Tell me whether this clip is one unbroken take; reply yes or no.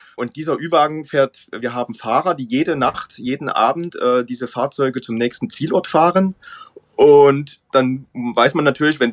yes